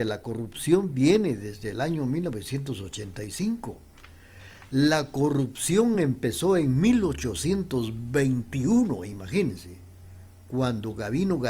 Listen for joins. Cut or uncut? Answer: uncut